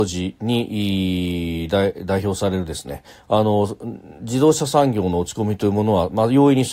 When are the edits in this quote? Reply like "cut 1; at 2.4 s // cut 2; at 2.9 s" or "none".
none

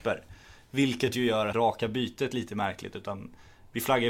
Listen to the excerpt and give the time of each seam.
cut 1; at 1.5 s

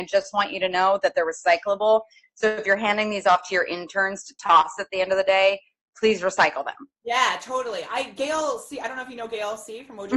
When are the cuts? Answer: none

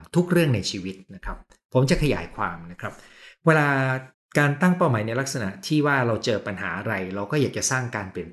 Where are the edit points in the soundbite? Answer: cut 1; at 4.1 s

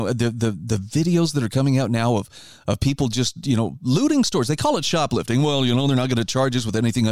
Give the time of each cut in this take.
none

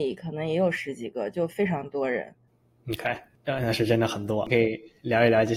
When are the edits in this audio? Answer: cut 1; at 2.5 s

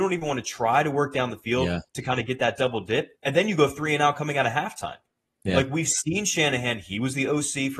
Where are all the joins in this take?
cut 1; at 3.1 s

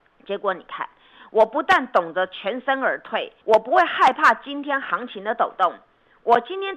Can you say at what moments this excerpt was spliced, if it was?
cut 1; at 3.4 s

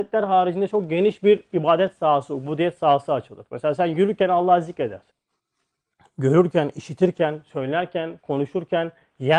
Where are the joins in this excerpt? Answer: none

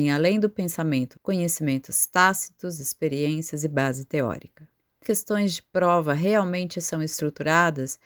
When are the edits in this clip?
cut 1; at 1.1 s // cut 2; at 5.0 s

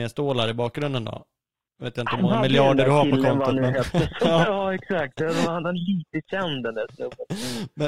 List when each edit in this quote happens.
none

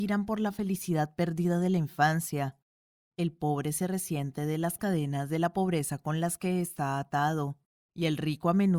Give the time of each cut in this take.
none

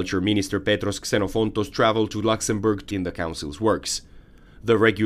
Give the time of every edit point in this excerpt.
cut 1; at 2.9 s

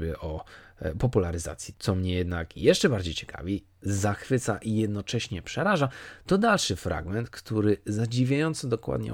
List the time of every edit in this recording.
cut 1; at 1.7 s

